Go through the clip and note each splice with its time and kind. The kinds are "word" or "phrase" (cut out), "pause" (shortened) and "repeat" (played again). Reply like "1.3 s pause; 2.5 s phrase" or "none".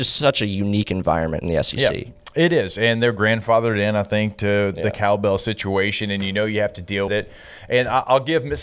7.1 s word